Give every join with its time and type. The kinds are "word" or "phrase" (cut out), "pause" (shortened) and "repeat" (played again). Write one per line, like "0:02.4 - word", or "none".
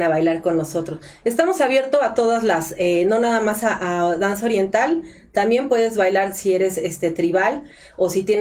none